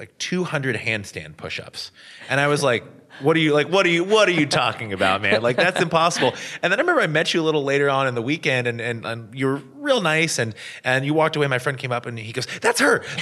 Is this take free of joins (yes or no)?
yes